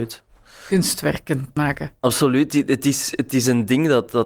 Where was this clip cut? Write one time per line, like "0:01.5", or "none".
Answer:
0:01.6